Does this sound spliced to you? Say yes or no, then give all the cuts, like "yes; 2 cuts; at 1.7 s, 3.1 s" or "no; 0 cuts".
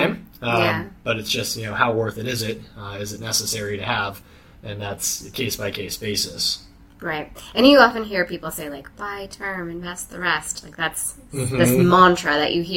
no; 0 cuts